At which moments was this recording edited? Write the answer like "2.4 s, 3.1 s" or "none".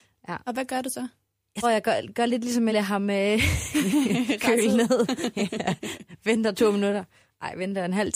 1.6 s, 2.7 s